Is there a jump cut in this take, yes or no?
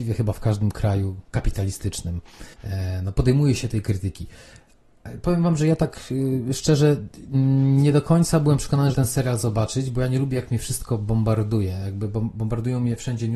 yes